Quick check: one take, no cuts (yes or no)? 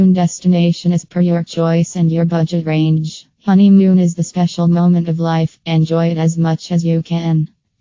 no